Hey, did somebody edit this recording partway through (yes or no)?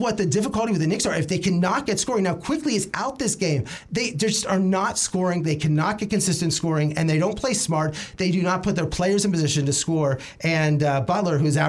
no